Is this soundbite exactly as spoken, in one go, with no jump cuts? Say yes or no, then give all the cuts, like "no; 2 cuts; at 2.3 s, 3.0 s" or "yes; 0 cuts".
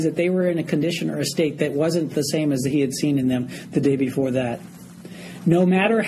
yes; 0 cuts